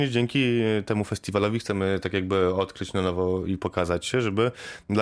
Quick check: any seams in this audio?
no; 0 cuts

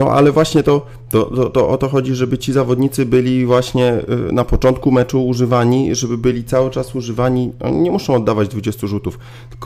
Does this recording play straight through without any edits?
yes; 0 cuts

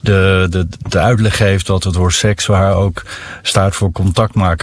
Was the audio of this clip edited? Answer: no; 0 cuts

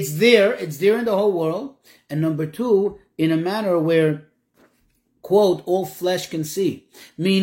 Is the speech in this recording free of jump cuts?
yes; 0 cuts

